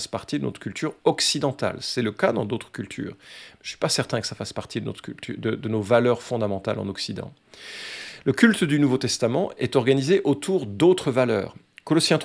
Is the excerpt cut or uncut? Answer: uncut